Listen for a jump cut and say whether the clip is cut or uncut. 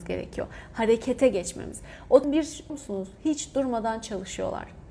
cut